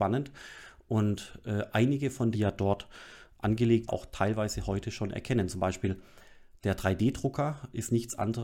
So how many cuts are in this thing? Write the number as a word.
two